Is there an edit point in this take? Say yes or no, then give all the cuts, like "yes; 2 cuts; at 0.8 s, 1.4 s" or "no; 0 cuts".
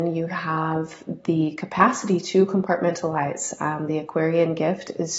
no; 0 cuts